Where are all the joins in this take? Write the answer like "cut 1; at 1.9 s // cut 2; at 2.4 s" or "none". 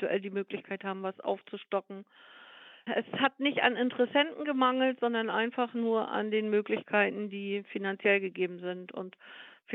none